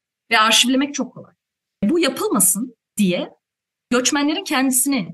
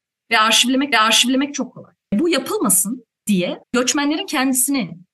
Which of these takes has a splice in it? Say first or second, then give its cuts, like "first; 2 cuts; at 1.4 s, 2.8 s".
second; 3 cuts; at 0.9 s, 2.0 s, 3.6 s